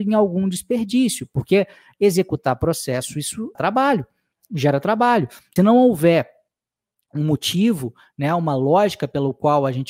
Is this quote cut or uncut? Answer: cut